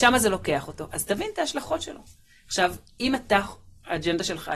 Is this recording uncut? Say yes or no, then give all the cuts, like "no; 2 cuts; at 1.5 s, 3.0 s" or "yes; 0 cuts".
yes; 0 cuts